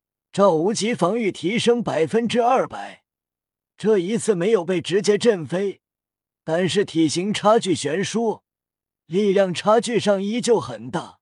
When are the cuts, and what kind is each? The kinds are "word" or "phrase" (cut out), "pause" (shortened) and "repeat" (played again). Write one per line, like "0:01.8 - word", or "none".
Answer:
none